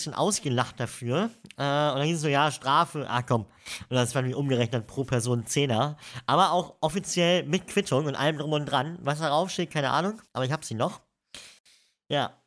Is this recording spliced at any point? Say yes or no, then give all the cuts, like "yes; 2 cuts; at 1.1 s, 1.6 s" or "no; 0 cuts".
yes; 1 cut; at 10.3 s